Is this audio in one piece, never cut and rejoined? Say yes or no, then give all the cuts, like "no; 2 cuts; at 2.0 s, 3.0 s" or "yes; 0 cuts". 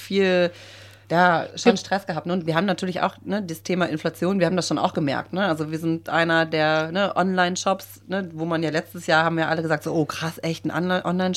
yes; 0 cuts